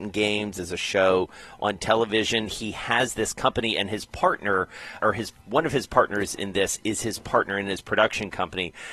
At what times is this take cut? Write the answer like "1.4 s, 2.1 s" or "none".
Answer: 5.0 s